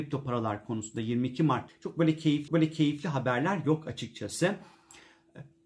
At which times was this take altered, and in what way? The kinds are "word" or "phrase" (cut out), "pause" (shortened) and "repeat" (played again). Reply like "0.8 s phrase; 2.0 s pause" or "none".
1.7 s word; 2.5 s repeat